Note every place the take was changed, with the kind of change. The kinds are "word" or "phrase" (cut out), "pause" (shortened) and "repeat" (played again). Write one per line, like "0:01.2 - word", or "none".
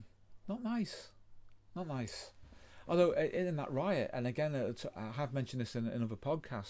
none